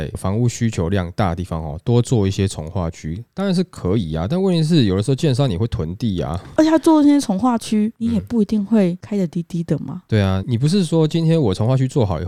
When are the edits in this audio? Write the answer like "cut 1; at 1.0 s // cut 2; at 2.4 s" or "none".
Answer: cut 1; at 6.6 s